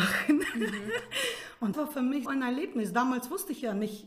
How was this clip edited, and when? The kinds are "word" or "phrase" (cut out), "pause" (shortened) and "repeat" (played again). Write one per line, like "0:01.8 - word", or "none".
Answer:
0:01.7 - word
0:02.3 - word

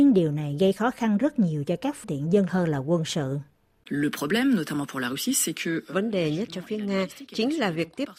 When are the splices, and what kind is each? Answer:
0:02.0 - word
0:02.5 - word
0:06.5 - word

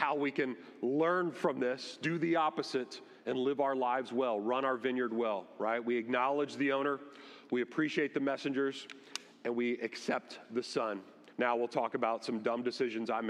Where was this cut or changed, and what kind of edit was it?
0:03.2 - pause
0:11.3 - pause

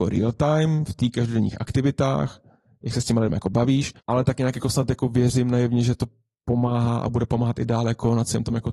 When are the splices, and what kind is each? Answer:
0:04.0 - pause

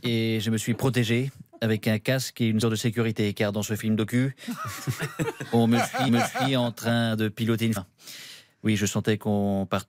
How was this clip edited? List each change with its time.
0:02.6 - word
0:06.1 - repeat
0:07.8 - word

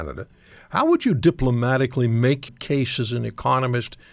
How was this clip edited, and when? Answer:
0:02.5 - word

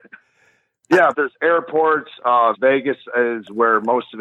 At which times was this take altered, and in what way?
0:01.1 - phrase
0:02.5 - word

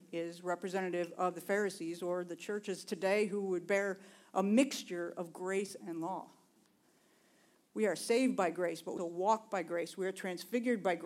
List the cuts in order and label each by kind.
0:09.0 - word

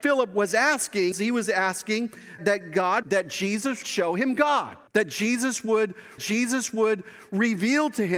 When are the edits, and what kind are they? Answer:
0:01.1 - word
0:02.4 - word
0:03.0 - word
0:03.8 - word
0:04.9 - pause
0:06.2 - repeat

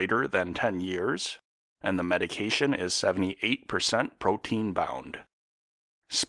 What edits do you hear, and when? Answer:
none

